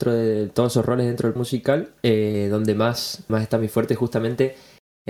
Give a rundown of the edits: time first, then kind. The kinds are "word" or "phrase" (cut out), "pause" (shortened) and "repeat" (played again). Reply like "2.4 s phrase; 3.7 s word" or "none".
1.4 s word; 2.0 s pause; 3.3 s word